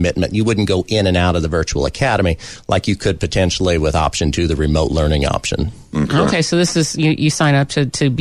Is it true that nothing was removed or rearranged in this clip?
yes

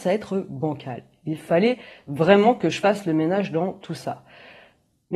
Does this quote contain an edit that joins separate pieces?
no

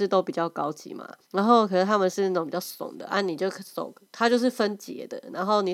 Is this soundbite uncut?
no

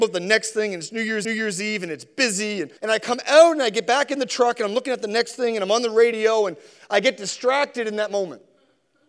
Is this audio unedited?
no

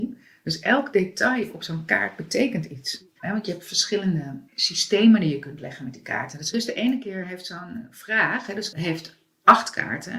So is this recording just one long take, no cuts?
no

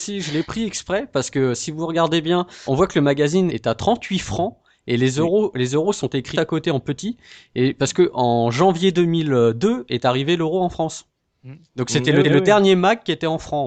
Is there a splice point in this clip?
yes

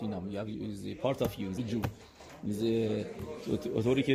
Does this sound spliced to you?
yes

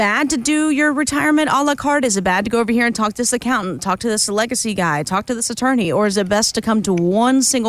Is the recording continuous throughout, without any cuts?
yes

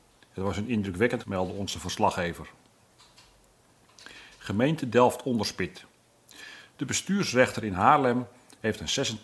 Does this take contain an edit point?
yes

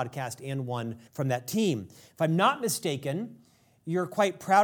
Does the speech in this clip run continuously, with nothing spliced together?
no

